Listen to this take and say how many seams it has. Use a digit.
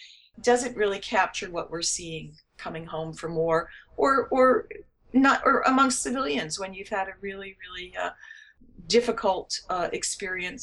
0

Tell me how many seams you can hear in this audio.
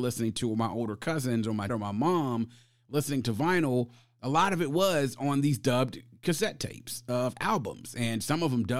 1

